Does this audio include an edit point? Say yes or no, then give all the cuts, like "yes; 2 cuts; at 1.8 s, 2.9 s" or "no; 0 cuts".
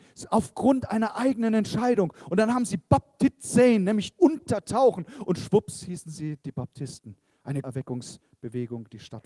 yes; 2 cuts; at 4.1 s, 7.6 s